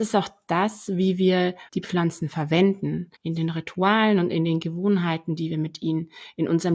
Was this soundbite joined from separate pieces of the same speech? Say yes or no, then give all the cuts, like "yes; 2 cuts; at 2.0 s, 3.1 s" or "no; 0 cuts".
yes; 2 cuts; at 1.7 s, 3.2 s